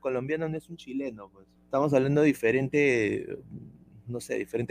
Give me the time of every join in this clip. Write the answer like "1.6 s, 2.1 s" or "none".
1.6 s